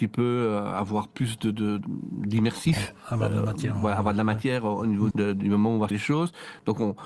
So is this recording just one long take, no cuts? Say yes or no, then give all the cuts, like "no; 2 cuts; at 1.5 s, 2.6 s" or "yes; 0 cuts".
no; 2 cuts; at 5.1 s, 5.9 s